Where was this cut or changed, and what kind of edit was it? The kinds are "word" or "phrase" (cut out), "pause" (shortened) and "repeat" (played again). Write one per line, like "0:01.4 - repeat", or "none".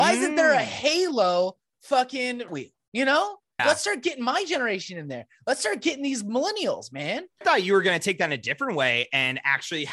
0:02.5 - word
0:03.6 - word
0:07.4 - word